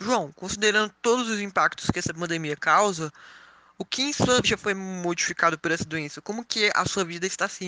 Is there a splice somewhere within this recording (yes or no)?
yes